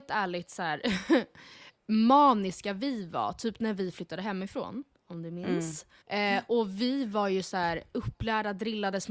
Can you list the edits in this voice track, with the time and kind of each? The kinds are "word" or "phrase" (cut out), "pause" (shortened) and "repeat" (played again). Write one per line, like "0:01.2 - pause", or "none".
0:06.0 - pause